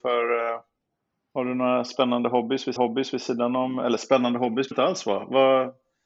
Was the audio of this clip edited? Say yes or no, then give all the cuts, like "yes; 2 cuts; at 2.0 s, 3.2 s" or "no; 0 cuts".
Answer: yes; 2 cuts; at 2.8 s, 4.7 s